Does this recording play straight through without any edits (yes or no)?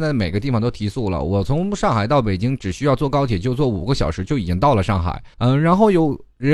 no